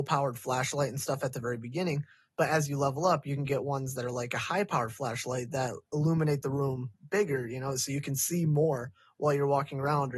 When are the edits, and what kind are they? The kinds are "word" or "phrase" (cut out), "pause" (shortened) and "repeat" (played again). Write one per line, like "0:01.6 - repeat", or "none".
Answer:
none